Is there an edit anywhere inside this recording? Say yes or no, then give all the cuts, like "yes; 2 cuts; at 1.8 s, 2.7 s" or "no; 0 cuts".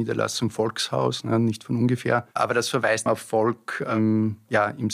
yes; 2 cuts; at 2.3 s, 3.1 s